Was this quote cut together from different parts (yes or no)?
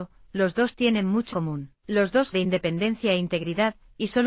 yes